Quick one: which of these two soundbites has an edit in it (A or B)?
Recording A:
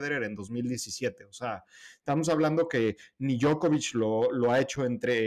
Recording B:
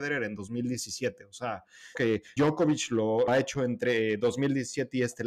B